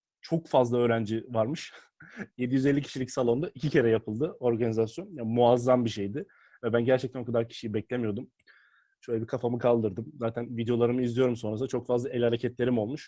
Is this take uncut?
yes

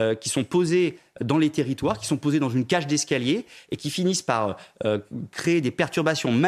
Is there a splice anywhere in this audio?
no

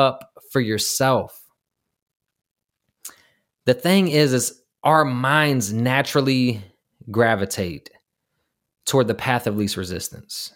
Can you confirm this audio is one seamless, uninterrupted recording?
yes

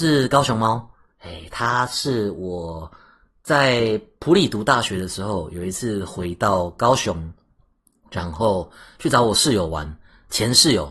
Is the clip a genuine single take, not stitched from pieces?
yes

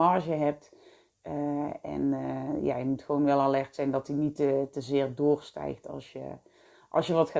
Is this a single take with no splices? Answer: yes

